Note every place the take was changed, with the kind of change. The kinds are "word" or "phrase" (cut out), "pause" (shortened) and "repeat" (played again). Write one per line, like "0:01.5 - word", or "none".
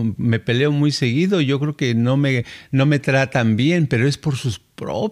none